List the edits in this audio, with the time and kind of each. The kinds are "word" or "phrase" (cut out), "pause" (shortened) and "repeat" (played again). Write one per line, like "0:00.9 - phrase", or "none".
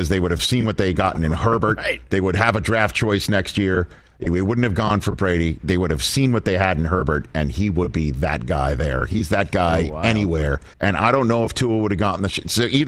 0:10.7 - pause